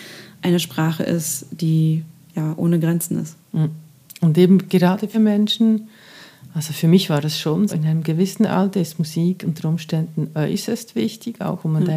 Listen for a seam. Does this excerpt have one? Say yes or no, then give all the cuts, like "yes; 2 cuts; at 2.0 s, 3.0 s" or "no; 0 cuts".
yes; 3 cuts; at 2.3 s, 5.1 s, 7.7 s